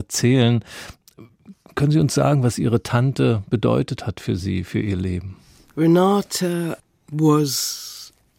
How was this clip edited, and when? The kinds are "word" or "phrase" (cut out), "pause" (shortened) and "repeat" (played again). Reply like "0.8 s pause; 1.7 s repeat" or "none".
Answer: none